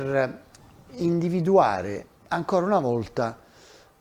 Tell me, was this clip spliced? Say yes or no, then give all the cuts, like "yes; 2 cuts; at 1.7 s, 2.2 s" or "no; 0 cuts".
yes; 1 cut; at 2.2 s